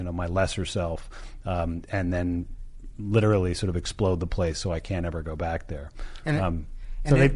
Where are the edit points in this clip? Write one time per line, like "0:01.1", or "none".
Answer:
none